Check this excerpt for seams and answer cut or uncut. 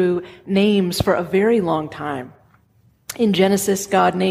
uncut